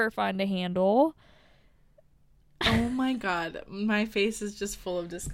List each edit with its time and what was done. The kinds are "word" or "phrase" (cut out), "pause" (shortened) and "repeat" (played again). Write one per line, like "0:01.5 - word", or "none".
none